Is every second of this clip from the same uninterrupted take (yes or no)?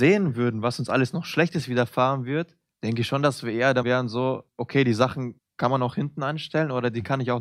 no